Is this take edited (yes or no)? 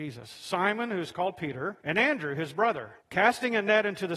yes